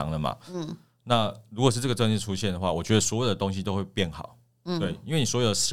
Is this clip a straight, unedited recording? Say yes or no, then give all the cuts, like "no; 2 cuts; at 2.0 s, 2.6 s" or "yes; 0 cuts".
yes; 0 cuts